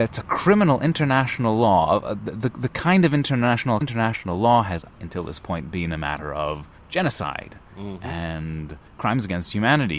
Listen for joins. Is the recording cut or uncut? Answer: cut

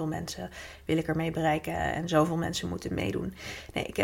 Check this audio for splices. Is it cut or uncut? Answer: uncut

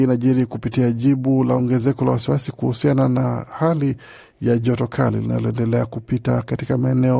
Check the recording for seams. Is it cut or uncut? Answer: uncut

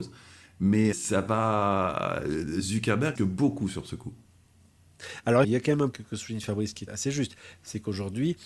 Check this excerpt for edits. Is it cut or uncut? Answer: cut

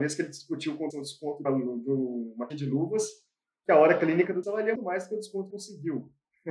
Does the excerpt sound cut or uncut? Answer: cut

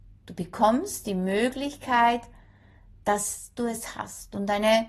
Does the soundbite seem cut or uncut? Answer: uncut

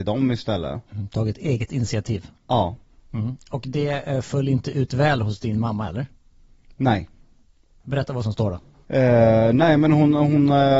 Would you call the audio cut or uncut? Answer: uncut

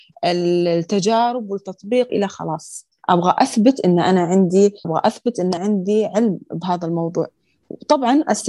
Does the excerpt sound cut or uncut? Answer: cut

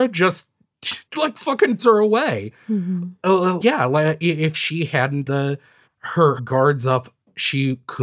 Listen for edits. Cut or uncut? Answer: cut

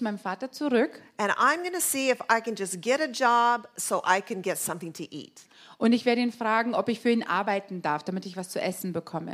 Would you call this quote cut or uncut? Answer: uncut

